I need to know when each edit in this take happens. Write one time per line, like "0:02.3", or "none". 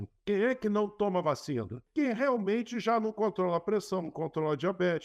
none